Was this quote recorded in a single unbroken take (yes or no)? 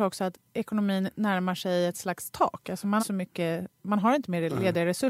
no